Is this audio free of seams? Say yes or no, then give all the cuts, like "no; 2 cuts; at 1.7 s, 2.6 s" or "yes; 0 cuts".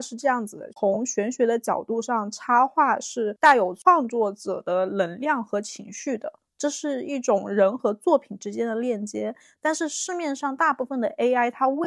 yes; 0 cuts